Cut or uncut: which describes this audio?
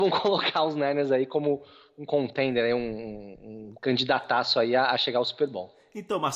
uncut